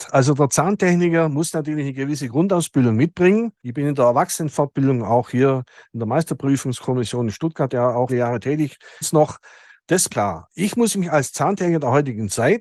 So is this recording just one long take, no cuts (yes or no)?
no